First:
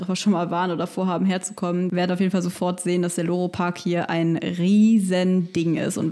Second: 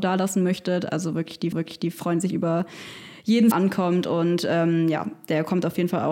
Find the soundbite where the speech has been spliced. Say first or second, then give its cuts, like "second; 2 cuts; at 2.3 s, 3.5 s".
second; 2 cuts; at 1.5 s, 3.5 s